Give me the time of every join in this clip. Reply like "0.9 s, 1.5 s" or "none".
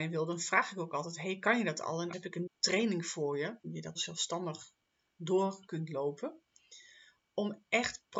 2.1 s, 2.5 s, 3.6 s, 3.9 s